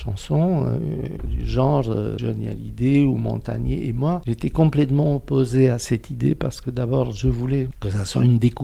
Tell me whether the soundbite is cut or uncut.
uncut